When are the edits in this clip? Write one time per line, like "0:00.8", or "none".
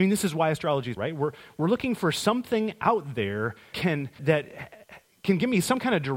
0:01.0
0:03.7
0:04.2